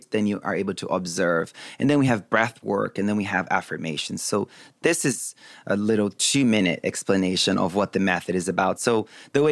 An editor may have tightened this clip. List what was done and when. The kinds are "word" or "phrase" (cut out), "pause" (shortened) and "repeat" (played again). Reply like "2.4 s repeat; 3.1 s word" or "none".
none